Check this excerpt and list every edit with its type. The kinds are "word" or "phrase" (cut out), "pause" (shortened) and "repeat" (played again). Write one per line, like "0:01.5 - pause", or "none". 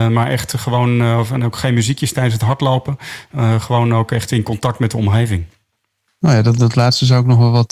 none